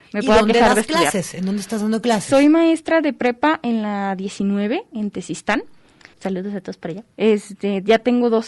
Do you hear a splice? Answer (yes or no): yes